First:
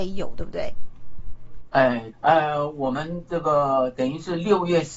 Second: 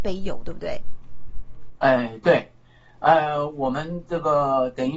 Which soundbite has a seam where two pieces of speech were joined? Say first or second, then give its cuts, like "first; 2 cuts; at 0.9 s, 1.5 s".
first; 1 cut; at 2.1 s